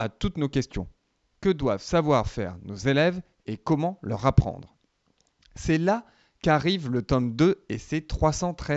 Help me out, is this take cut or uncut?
uncut